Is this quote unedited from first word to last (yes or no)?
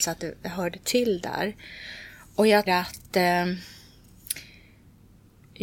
no